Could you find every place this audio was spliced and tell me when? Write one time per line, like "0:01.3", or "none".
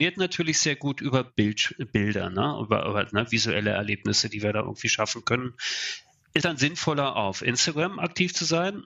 0:06.4